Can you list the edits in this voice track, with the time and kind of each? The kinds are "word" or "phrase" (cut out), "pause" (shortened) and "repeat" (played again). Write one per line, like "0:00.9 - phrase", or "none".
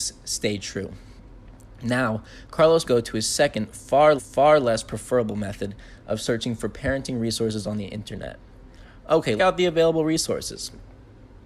0:02.8 - word
0:04.2 - repeat
0:09.4 - phrase